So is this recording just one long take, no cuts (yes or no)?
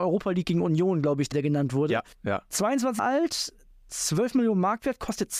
no